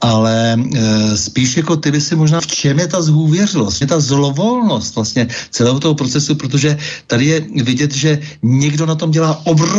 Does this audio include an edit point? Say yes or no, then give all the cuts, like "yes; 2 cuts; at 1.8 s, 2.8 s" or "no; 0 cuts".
yes; 2 cuts; at 2.4 s, 3.8 s